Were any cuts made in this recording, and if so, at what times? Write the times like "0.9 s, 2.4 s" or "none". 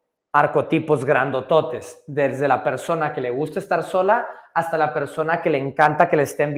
none